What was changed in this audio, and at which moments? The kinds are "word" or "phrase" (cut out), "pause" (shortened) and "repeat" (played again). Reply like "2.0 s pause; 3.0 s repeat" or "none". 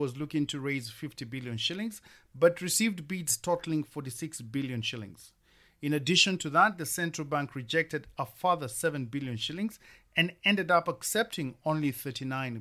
none